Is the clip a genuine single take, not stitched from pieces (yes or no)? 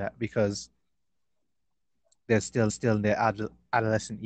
no